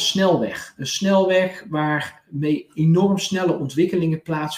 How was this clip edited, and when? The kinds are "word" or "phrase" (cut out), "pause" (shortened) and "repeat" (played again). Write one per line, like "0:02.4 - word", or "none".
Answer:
none